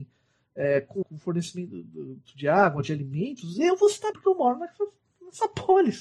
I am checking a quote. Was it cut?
yes; 2 cuts; at 1.0 s, 4.1 s

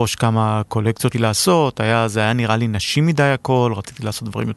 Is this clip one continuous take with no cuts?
no; 1 cut; at 1.1 s

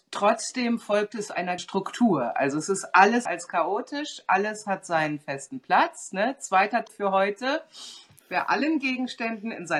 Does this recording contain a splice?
yes; 3 cuts; at 1.6 s, 3.3 s, 6.9 s

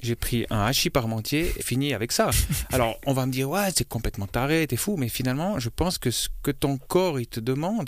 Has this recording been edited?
yes; 1 cut; at 1.6 s

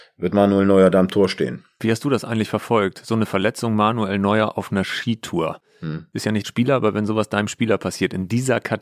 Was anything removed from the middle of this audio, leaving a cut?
yes; 1 cut; at 6.4 s

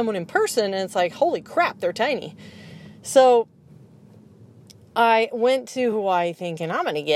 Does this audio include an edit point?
no; 0 cuts

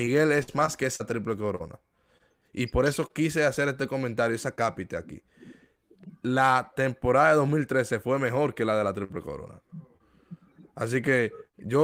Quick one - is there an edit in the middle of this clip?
no; 0 cuts

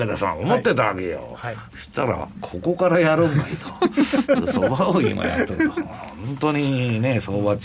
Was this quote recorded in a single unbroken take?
yes; 0 cuts

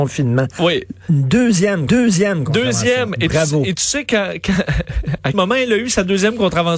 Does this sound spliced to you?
yes; 2 cuts; at 1.9 s, 5.3 s

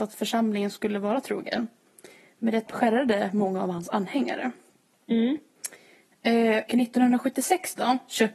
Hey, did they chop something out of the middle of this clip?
yes; 2 cuts; at 2.7 s, 6.7 s

